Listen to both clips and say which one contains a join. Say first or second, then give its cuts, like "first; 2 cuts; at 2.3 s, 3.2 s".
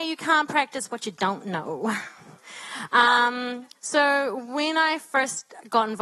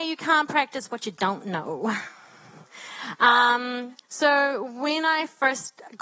first; 1 cut; at 2.2 s